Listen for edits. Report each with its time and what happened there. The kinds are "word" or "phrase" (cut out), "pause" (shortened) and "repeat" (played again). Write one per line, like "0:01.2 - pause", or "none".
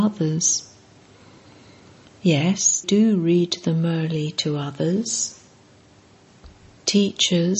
0:02.8 - word